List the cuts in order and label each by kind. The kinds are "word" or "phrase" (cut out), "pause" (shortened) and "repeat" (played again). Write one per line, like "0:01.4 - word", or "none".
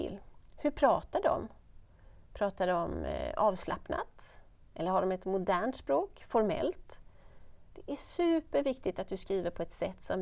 none

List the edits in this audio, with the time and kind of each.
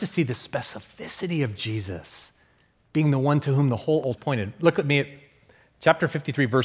0:04.2 - phrase

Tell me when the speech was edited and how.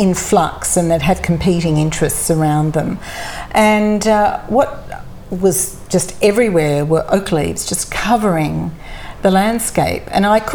none

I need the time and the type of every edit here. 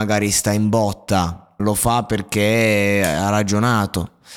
0:01.6 - word

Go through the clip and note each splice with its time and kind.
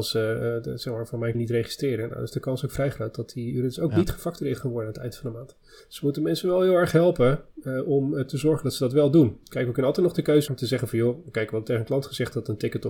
0:01.3 - phrase
0:05.8 - pause
0:10.5 - word

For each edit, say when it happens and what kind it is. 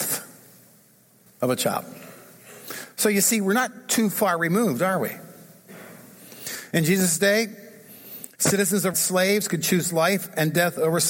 0:08.9 - phrase

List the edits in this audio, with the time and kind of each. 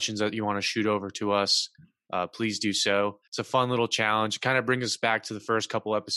0:03.3 - pause

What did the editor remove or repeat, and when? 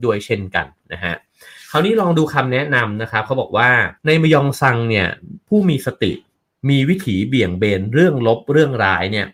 0:04.0 - pause

